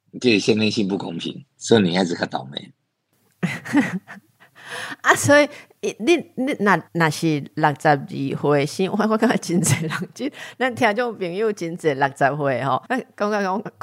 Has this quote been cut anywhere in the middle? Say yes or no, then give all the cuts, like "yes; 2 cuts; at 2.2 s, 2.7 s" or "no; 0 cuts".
yes; 3 cuts; at 1.5 s, 6.9 s, 12.9 s